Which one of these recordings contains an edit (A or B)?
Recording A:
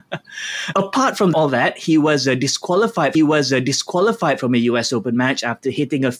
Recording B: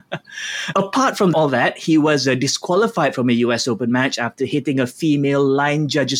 A